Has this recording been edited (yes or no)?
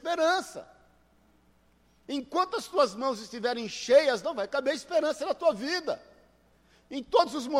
no